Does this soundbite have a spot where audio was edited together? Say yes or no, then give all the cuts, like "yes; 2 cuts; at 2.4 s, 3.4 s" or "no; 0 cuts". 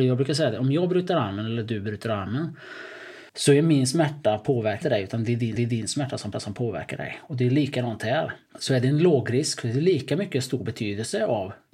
yes; 5 cuts; at 3.3 s, 4.8 s, 5.6 s, 6.3 s, 8.5 s